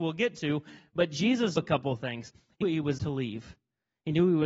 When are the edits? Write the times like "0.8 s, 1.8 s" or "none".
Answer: 1.6 s, 2.6 s, 3.0 s

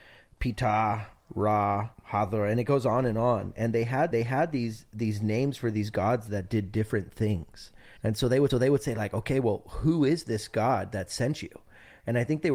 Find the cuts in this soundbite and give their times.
1.9 s, 4.1 s, 8.0 s, 8.5 s

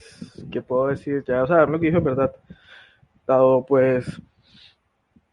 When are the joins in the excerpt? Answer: 1.7 s

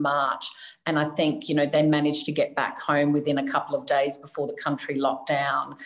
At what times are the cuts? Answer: none

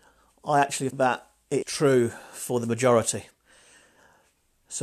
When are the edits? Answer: 0.9 s, 1.6 s

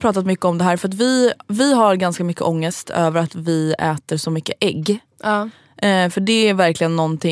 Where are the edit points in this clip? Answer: none

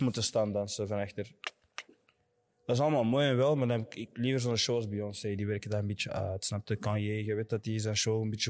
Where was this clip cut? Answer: none

